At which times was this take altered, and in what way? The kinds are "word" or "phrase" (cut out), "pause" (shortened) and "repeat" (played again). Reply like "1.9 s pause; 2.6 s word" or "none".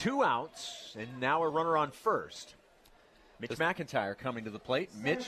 none